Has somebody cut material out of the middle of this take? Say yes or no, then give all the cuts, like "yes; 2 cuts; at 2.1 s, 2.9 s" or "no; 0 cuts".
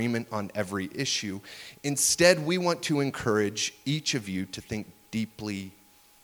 no; 0 cuts